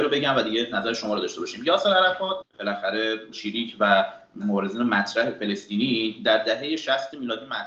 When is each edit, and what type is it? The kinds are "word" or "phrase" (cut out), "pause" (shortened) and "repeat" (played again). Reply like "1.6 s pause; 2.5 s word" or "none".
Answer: 2.4 s phrase; 3.3 s word; 4.4 s word